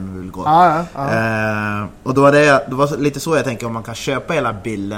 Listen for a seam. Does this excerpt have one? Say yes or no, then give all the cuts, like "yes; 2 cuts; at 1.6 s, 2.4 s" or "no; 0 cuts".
no; 0 cuts